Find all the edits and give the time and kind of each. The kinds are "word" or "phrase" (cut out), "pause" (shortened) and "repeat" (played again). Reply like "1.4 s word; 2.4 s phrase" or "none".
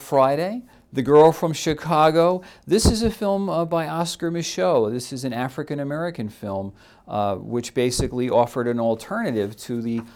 none